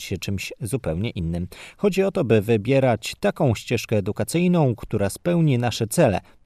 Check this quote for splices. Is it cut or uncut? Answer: uncut